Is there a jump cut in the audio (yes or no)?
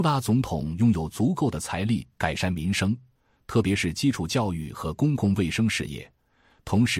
no